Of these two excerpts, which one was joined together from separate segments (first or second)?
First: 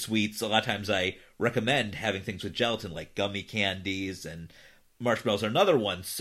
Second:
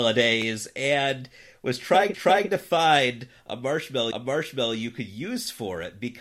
second